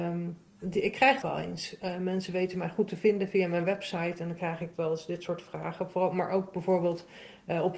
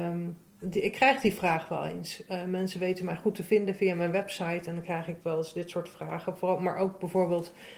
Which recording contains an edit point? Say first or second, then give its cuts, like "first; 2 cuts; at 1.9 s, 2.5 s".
first; 1 cut; at 1.2 s